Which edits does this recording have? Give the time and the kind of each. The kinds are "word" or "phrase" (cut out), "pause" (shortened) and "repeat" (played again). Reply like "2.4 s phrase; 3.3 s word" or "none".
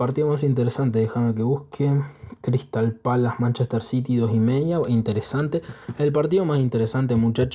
none